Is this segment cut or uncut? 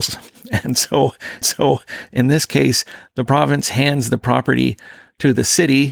cut